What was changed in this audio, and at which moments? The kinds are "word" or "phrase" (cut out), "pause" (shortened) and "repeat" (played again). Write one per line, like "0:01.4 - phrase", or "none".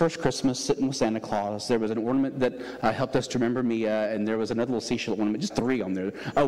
0:05.5 - word